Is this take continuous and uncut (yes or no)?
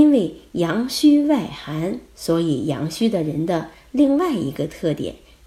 yes